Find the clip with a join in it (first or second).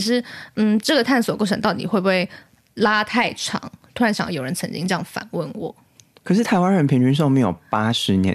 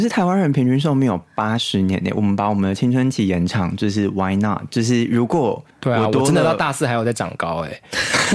second